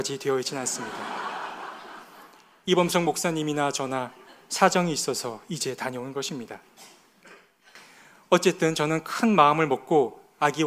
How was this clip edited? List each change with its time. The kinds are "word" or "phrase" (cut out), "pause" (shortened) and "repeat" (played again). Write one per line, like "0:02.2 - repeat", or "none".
none

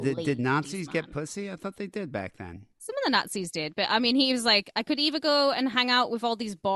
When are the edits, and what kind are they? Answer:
0:02.7 - pause

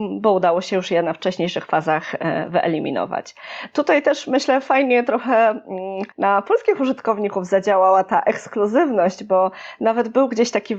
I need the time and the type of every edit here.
0:06.1 - pause

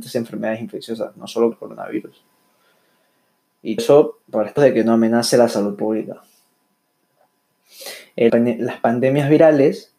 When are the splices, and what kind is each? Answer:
0:01.5 - word
0:03.8 - word
0:04.2 - pause
0:04.6 - word
0:08.3 - word

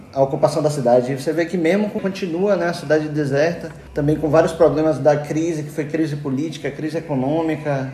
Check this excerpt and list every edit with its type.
0:02.0 - phrase

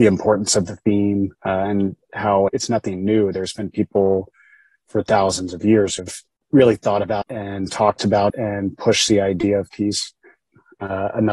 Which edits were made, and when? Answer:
0:01.3 - pause
0:02.5 - word
0:06.0 - word
0:07.2 - word
0:08.3 - word

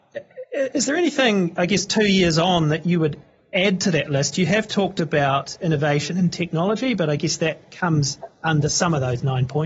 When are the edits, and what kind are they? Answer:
none

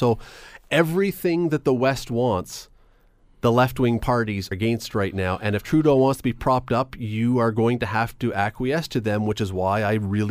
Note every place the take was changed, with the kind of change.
0:04.5 - word

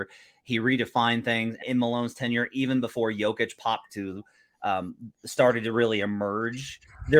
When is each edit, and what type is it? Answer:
0:01.6 - phrase

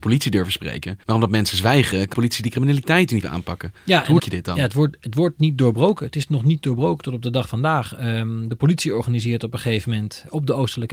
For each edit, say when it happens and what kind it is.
0:01.0 - pause
0:02.1 - word
0:03.2 - word
0:04.2 - word
0:07.5 - word

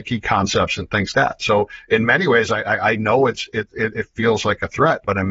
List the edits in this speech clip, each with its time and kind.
0:01.1 - word

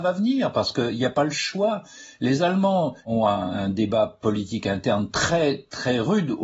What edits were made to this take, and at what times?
0:03.0 - pause

